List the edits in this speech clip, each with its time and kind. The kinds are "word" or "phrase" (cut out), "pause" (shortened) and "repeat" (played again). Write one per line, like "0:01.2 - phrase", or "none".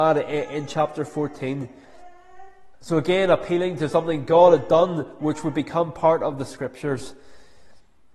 0:02.7 - pause